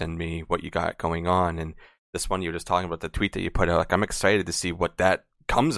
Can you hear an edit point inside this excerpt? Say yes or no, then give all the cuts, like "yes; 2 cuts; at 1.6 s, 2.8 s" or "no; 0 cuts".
no; 0 cuts